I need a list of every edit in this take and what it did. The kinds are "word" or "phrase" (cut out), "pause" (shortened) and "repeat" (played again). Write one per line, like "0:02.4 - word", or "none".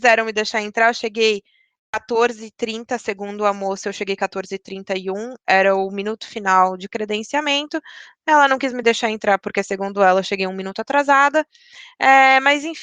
none